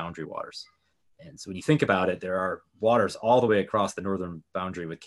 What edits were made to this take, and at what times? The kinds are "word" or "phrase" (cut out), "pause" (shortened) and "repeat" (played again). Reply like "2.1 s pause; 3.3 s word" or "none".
none